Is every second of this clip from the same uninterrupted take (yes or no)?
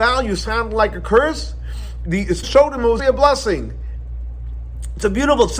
no